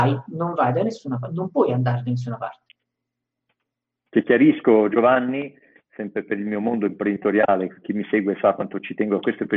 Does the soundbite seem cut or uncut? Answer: uncut